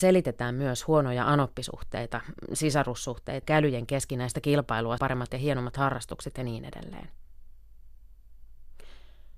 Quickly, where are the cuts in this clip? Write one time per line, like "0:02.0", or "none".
0:03.4
0:05.0
0:05.3